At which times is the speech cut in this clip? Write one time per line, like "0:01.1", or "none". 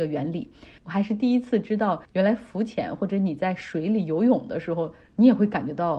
0:02.0

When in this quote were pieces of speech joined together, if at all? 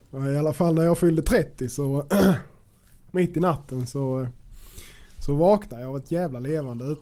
none

